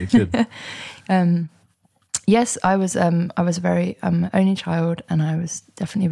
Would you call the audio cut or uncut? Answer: uncut